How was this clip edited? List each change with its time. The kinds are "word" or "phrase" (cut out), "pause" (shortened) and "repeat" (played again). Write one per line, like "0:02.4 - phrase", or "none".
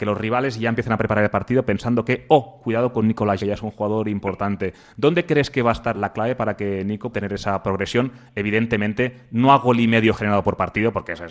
0:03.4 - word
0:05.9 - word
0:07.1 - word

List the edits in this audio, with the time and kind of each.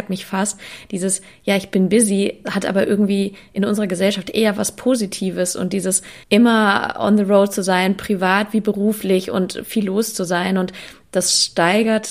0:02.4 - word
0:06.2 - pause

